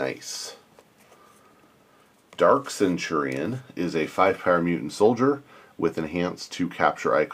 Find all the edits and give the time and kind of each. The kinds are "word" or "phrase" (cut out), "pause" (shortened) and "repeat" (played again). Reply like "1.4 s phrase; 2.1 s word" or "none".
none

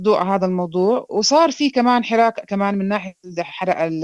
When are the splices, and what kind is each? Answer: none

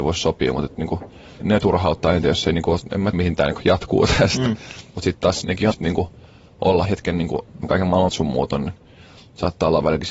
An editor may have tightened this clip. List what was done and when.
1.4 s word; 2.8 s word; 3.1 s word; 5.4 s word; 5.7 s word; 6.9 s word; 7.6 s word; 8.1 s word

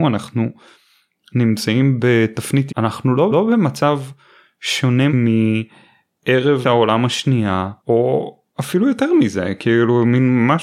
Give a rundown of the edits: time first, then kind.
2.7 s word; 3.3 s repeat; 5.1 s word; 6.6 s word; 7.8 s pause

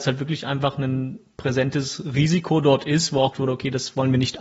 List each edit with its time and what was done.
3.3 s word

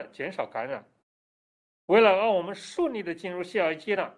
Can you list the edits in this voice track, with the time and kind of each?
none

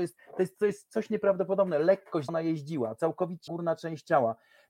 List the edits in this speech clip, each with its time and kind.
2.3 s word; 3.5 s word

